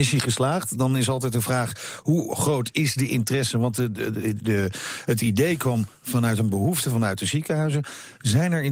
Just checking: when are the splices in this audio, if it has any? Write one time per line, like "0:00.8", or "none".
none